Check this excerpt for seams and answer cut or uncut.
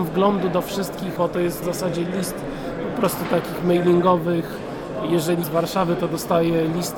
cut